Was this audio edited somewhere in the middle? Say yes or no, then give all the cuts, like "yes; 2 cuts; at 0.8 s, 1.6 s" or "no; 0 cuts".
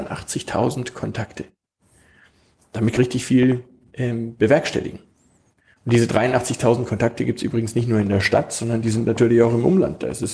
yes; 1 cut; at 3.0 s